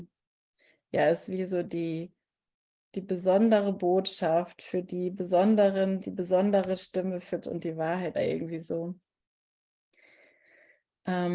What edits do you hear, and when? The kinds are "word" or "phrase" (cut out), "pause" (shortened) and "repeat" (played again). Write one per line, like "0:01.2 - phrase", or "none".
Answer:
0:06.0 - word
0:07.4 - word
0:08.1 - phrase

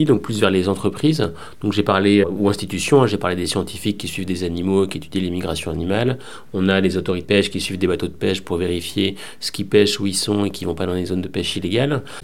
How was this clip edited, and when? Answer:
0:02.2 - word
0:07.2 - word

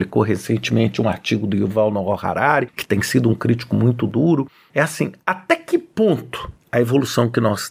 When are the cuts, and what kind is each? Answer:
none

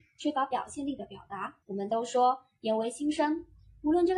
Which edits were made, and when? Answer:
0:01.6 - pause

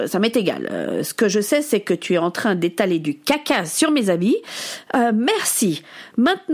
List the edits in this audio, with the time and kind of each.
none

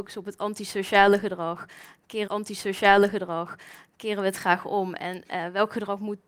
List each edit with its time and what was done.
0:02.3 - repeat

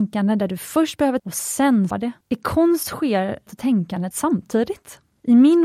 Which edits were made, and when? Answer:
0:01.2 - word
0:01.9 - word
0:02.2 - pause
0:03.5 - word
0:04.1 - word

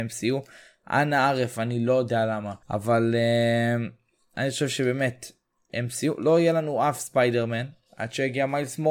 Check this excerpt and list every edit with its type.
0:02.6 - pause

